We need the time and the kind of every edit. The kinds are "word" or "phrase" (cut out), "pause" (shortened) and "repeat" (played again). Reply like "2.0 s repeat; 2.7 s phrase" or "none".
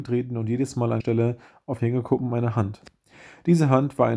1.0 s word; 1.8 s word